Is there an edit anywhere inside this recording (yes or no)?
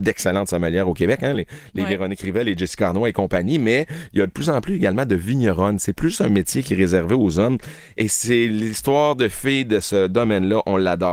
no